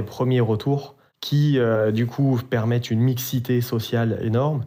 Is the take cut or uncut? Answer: uncut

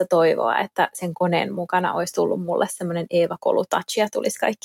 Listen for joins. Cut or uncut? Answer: uncut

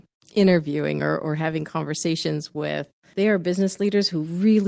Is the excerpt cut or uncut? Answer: uncut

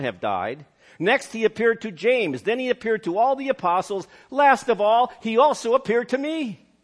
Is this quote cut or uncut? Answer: uncut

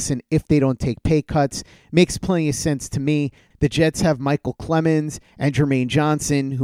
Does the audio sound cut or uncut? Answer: uncut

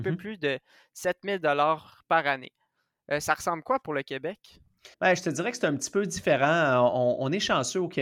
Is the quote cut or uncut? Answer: cut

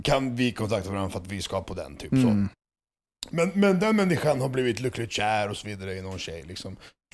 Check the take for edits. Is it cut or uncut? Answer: uncut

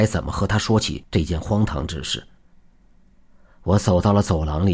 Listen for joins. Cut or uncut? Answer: uncut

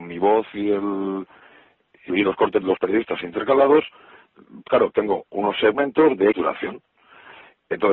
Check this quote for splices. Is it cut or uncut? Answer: cut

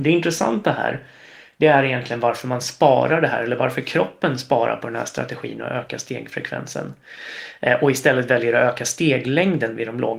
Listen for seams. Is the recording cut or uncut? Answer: uncut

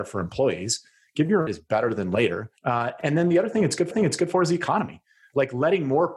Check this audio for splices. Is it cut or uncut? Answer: cut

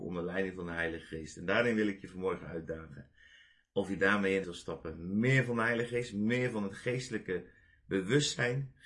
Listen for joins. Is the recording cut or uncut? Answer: cut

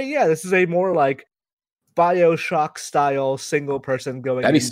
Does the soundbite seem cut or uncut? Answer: uncut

